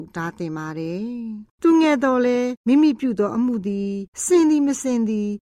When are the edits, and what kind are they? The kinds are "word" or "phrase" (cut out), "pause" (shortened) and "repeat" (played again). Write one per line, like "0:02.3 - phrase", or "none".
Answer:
0:01.6 - pause